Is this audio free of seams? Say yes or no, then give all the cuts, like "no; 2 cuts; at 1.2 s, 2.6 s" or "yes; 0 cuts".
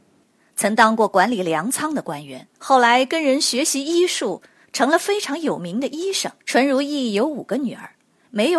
no; 2 cuts; at 2.5 s, 6.4 s